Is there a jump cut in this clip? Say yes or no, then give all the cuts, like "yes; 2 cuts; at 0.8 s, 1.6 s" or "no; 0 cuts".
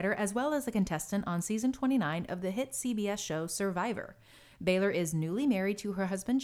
no; 0 cuts